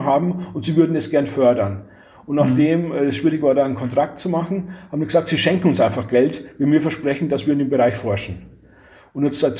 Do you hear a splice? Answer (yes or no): no